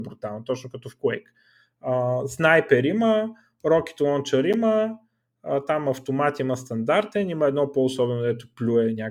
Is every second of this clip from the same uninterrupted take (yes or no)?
yes